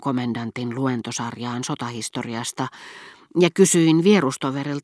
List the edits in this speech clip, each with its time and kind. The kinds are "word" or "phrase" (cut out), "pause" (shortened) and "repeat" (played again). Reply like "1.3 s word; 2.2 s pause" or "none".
none

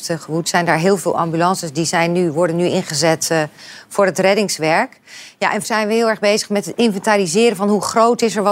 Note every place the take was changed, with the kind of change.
5.6 s word

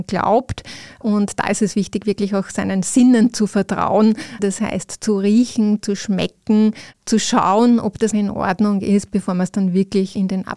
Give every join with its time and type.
8.1 s word

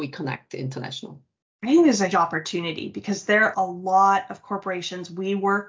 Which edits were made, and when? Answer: 2.1 s word; 3.5 s word

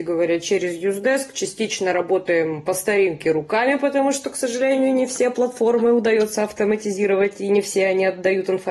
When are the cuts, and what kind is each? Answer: none

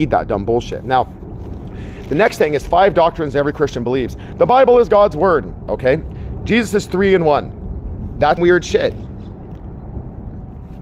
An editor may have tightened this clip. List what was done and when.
8.4 s word

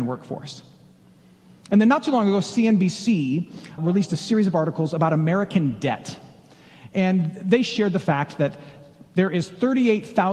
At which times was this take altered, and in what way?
3.8 s word; 9.1 s pause

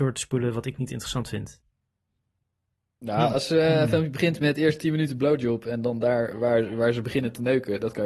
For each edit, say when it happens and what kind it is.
none

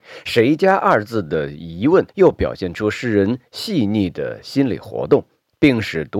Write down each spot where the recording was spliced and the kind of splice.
2.1 s pause

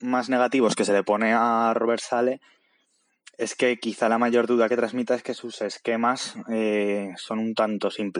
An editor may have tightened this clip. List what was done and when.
none

